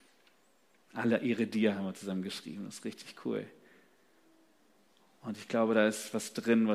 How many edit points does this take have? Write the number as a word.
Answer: zero